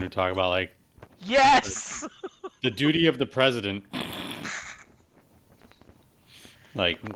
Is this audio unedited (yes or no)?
yes